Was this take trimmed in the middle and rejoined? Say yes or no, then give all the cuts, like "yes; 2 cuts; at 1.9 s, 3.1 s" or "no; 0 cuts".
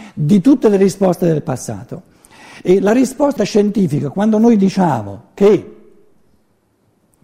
yes; 1 cut; at 3.4 s